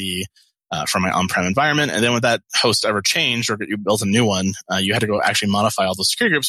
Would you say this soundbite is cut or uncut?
uncut